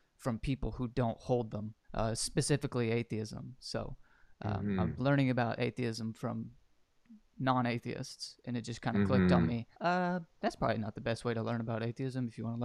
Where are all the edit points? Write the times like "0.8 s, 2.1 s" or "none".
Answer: 1.8 s, 9.7 s